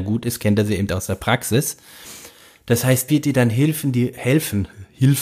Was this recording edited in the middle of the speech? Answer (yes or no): yes